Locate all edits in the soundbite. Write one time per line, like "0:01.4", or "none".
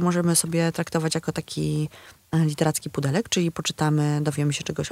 none